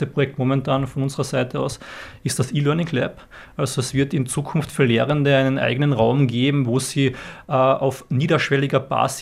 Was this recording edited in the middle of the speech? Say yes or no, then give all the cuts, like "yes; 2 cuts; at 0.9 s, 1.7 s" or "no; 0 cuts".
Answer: no; 0 cuts